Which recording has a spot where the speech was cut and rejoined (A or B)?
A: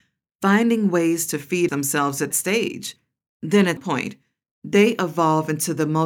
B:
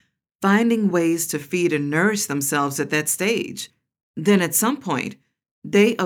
A